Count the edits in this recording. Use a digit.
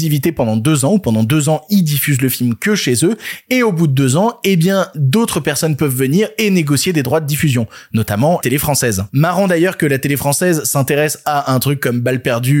1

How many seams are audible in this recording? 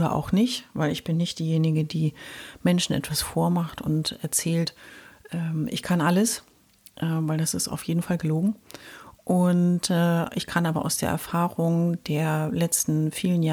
0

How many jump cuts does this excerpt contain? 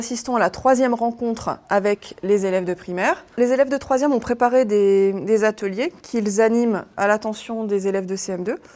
2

